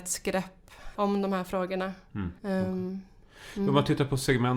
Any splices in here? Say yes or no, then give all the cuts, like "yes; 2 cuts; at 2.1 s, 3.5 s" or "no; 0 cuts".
yes; 2 cuts; at 0.9 s, 2.4 s